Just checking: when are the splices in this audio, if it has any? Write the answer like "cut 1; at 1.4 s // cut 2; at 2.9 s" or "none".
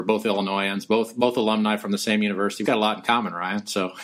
cut 1; at 2.6 s